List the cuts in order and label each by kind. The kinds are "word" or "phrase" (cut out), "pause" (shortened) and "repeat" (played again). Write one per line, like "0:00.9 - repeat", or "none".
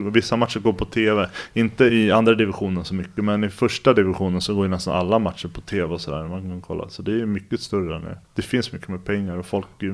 0:08.2 - pause